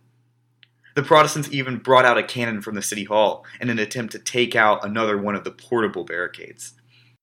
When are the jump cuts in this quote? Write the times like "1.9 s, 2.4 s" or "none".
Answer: none